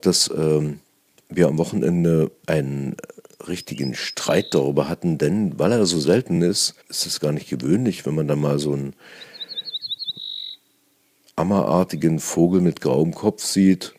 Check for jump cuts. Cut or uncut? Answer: uncut